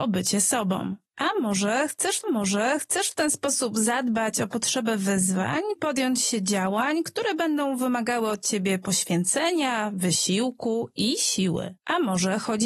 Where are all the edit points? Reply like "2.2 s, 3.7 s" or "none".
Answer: 1.1 s, 2.2 s, 5.8 s, 11.8 s